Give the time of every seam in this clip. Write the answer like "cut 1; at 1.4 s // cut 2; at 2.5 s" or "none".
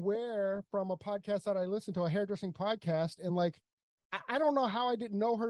none